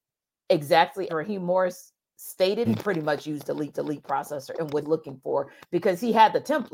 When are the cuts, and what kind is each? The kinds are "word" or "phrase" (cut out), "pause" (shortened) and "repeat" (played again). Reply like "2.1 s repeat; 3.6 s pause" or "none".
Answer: 1.1 s word; 2.6 s phrase; 3.7 s repeat; 4.8 s word